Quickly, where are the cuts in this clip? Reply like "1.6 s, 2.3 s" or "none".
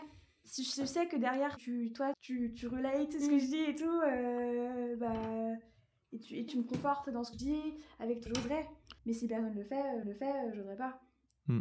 1.6 s, 2.1 s, 6.5 s, 7.3 s, 8.3 s, 9.0 s, 10.0 s

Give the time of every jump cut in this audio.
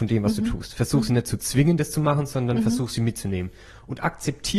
none

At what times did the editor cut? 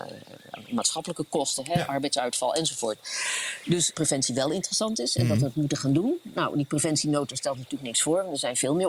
3.9 s

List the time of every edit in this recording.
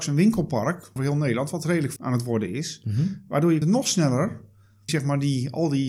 1.0 s, 2.0 s, 3.6 s, 4.9 s

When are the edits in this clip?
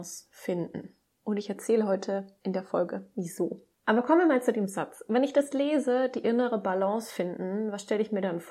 3.7 s

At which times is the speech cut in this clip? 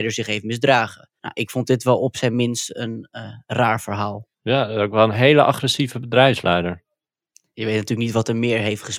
1.2 s, 4.3 s

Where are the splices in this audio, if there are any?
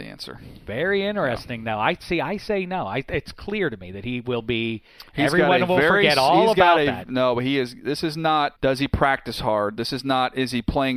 8.6 s

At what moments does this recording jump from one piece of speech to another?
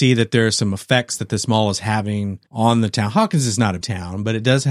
2.5 s, 3.8 s

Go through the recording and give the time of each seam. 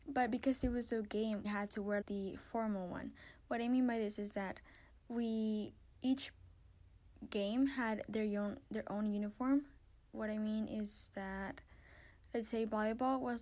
1.4 s, 2.0 s, 5.9 s

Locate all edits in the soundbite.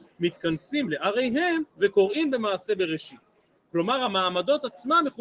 1.7 s

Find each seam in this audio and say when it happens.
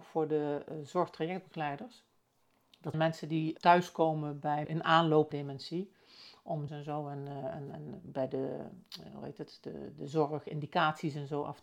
2.9 s, 3.6 s, 4.6 s, 5.3 s, 6.7 s, 7.7 s

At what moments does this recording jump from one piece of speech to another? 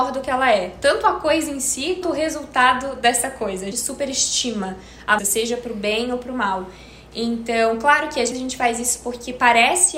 2.0 s, 3.7 s, 5.2 s, 8.3 s

